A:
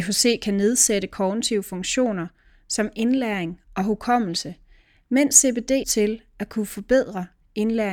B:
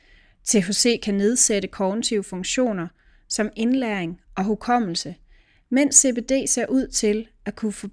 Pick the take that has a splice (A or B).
A